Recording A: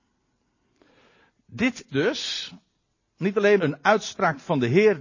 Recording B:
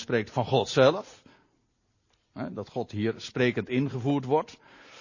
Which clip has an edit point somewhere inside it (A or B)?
A